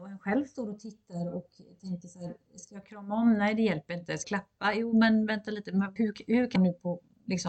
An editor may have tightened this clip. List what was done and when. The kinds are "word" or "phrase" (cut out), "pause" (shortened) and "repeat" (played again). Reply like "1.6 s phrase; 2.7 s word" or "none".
4.2 s word; 6.0 s word; 6.6 s word

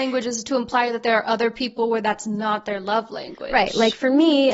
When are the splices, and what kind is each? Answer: none

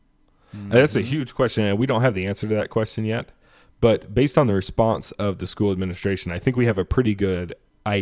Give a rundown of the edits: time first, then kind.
none

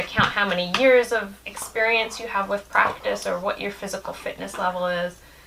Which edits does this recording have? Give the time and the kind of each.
1.4 s pause

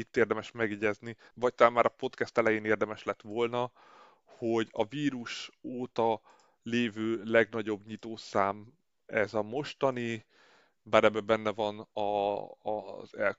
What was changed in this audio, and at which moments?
1.3 s pause

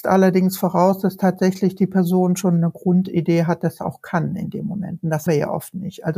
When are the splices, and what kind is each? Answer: 3.8 s word; 5.3 s word

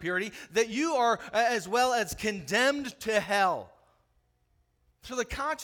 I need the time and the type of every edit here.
none

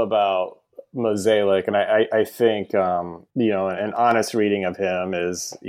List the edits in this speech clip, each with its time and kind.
3.3 s pause

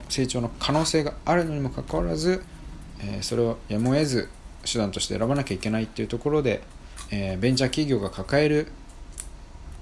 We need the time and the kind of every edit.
7.1 s phrase

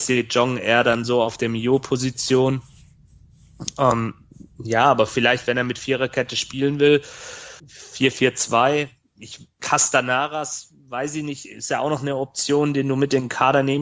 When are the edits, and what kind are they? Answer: 7.6 s pause; 9.5 s pause

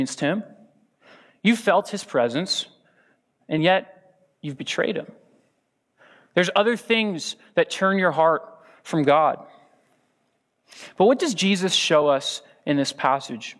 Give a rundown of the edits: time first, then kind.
none

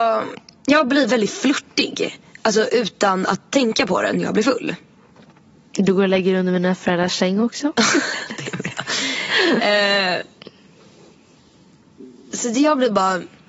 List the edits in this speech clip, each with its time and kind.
none

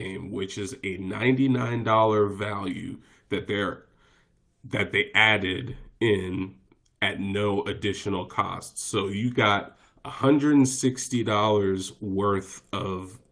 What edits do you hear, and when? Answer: none

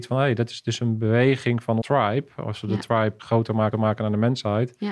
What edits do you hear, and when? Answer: 1.8 s word; 3.2 s word; 3.7 s repeat

